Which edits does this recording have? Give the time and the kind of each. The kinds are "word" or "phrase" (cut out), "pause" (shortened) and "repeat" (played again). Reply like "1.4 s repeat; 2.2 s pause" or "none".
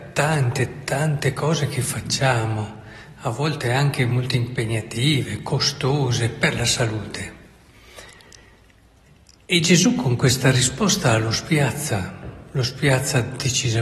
none